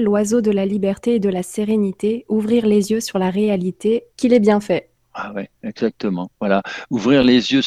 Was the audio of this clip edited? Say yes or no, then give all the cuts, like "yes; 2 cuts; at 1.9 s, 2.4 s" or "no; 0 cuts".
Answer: yes; 2 cuts; at 4.1 s, 5.0 s